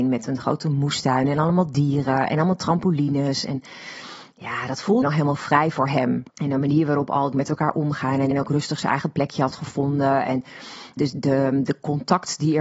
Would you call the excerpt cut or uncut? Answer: cut